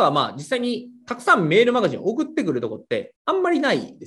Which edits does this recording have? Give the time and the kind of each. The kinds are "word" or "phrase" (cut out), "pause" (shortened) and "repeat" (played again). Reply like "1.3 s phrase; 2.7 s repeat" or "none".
3.2 s pause